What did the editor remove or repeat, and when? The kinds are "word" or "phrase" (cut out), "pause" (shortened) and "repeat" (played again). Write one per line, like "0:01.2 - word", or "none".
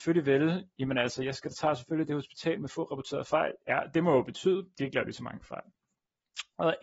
0:03.6 - pause